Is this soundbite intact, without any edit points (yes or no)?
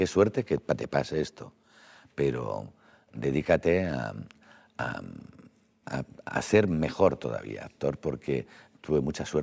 yes